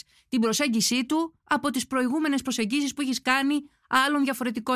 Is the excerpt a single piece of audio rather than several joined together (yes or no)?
yes